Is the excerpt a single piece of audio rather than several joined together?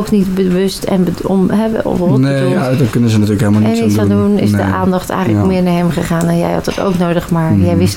yes; 0 cuts

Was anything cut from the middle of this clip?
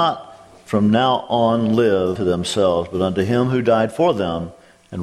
yes; 1 cut; at 2.2 s

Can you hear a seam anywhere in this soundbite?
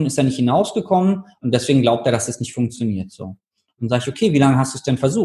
no; 0 cuts

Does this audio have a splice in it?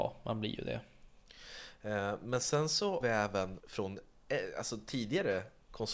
yes; 2 cuts; at 3.0 s, 3.6 s

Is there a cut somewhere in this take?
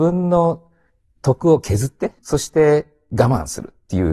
yes; 1 cut; at 2.2 s

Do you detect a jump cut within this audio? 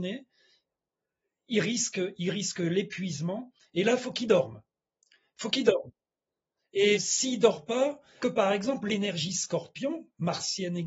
yes; 2 cuts; at 6.9 s, 8.2 s

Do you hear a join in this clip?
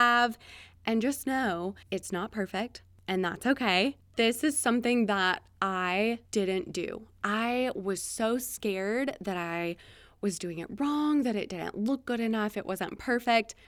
yes; 1 cut; at 6.2 s

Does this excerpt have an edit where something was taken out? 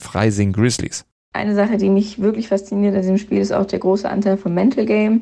no; 0 cuts

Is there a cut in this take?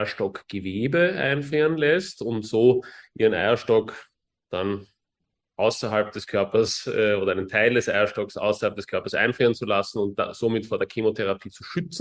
no; 0 cuts

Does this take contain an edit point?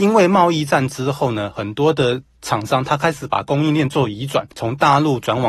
yes; 1 cut; at 4.5 s

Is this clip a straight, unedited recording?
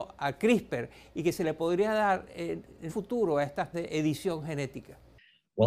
no; 2 cuts; at 2.9 s, 3.7 s

